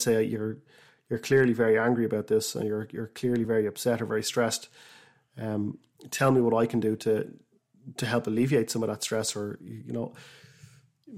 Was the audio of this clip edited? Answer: no; 0 cuts

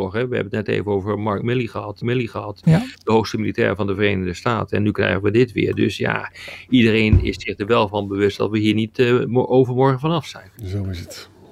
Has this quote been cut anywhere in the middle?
yes; 2 cuts; at 2.0 s, 10.6 s

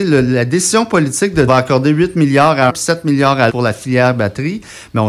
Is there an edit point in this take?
yes; 3 cuts; at 1.5 s, 2.7 s, 3.5 s

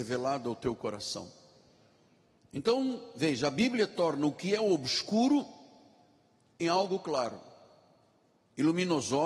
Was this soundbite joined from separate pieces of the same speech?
no; 0 cuts

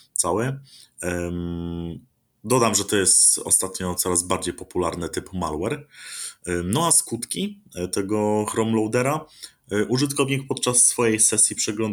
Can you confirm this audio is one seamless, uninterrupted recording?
no; 1 cut; at 2.3 s

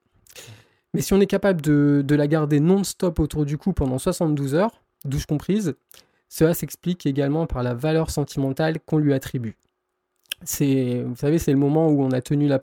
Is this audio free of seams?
yes; 0 cuts

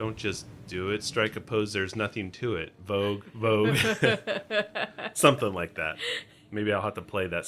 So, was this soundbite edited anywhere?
no; 0 cuts

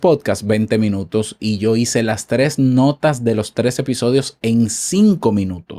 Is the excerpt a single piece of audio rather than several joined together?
yes; 0 cuts

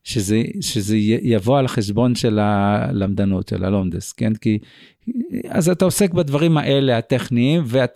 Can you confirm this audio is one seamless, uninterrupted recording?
yes; 0 cuts

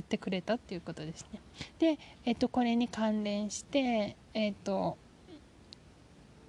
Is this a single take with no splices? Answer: yes; 0 cuts

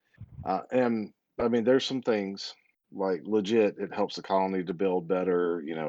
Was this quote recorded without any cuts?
yes; 0 cuts

